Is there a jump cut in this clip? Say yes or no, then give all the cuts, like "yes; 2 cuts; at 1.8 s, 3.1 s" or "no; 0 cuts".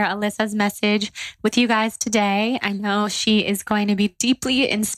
no; 0 cuts